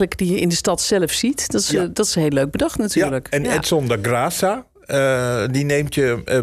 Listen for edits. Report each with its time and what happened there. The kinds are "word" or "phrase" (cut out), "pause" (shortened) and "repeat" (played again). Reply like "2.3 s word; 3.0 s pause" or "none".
none